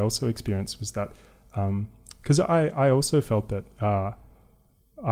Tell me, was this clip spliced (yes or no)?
no